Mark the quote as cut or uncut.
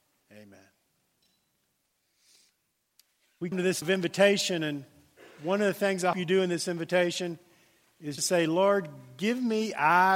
cut